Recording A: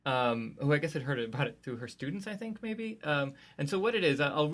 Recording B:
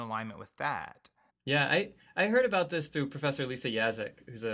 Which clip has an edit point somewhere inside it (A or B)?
B